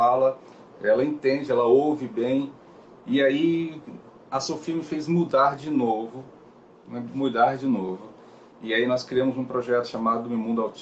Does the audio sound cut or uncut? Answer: uncut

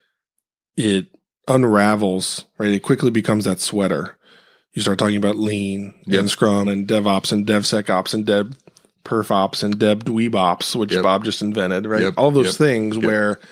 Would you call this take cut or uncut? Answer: cut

